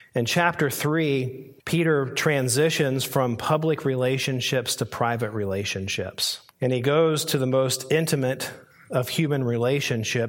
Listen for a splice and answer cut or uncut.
cut